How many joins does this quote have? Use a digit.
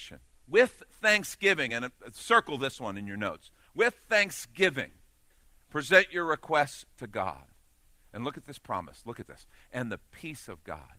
0